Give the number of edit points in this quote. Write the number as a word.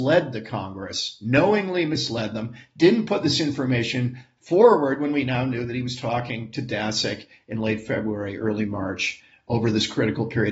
zero